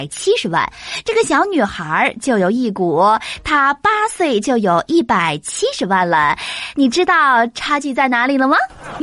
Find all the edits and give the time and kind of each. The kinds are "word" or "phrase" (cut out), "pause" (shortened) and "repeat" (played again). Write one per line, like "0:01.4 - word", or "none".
none